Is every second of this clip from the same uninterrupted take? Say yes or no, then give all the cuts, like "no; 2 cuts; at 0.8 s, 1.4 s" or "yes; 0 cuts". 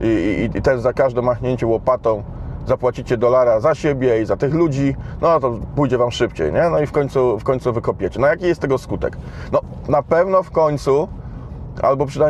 yes; 0 cuts